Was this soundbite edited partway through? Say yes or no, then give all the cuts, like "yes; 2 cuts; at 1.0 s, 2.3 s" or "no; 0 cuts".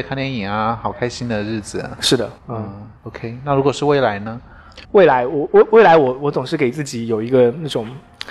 yes; 3 cuts; at 2.4 s, 3.0 s, 4.8 s